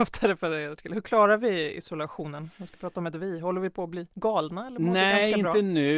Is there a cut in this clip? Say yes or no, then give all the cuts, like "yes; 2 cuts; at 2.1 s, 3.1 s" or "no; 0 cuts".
yes; 1 cut; at 4.1 s